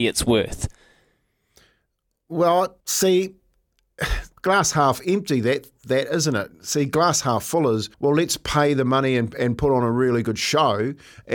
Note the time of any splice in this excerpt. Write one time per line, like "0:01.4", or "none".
0:02.8
0:04.4
0:07.9